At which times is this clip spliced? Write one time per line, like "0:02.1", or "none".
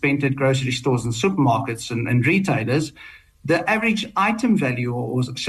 none